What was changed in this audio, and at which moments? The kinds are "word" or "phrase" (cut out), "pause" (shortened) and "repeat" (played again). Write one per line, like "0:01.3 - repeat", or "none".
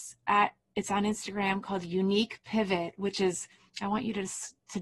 none

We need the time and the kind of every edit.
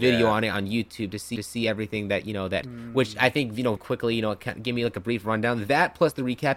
0:01.4 - repeat
0:02.6 - word
0:03.8 - word

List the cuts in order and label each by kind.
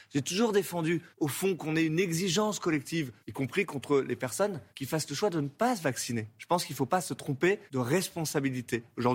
0:01.1 - pause
0:03.2 - pause
0:04.7 - pause
0:07.7 - pause

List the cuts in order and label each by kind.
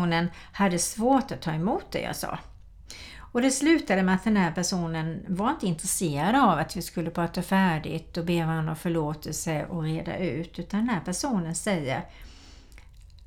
none

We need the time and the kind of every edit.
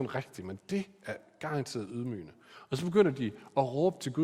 none

